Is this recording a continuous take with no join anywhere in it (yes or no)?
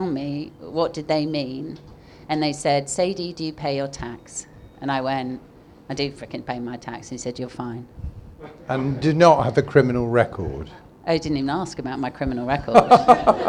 yes